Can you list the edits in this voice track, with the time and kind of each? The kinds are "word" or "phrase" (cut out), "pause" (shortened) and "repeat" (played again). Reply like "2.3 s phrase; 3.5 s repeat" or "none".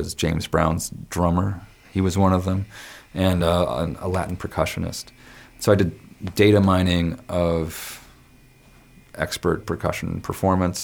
none